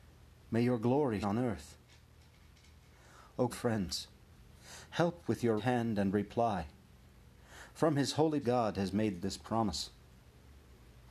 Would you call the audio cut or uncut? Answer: cut